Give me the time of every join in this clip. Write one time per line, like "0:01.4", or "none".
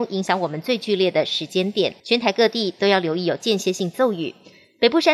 0:02.0